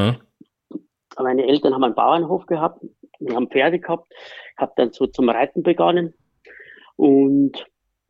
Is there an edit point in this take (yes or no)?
no